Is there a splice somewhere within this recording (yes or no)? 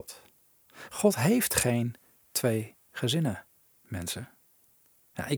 no